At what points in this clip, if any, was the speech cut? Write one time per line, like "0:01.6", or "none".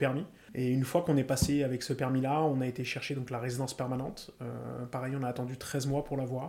none